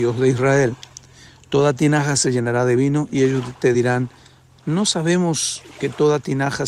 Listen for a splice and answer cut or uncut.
uncut